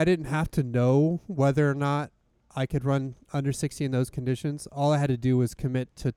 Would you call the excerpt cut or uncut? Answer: uncut